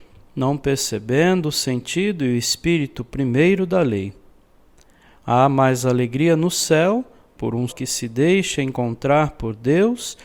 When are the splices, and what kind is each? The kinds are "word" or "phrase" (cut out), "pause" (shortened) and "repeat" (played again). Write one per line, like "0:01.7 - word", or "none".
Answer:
0:07.7 - word